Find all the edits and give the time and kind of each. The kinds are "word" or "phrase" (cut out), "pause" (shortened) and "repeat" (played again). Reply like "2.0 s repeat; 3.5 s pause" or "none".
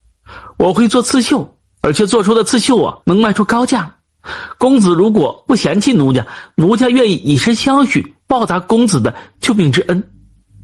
3.0 s pause; 8.2 s pause